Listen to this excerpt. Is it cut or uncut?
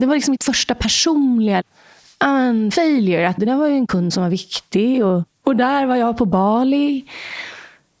cut